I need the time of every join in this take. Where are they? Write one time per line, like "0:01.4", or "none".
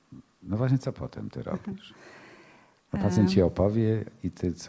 none